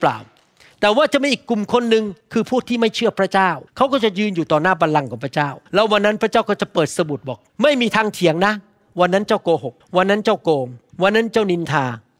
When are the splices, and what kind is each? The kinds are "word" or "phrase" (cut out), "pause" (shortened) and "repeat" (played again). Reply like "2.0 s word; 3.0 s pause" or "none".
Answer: 2.2 s pause; 3.7 s pause; 5.7 s pause; 7.5 s pause; 9.8 s pause; 10.9 s pause